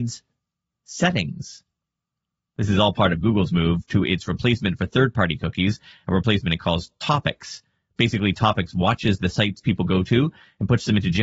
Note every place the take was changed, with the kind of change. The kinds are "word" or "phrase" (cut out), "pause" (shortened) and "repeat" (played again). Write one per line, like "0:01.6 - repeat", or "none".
none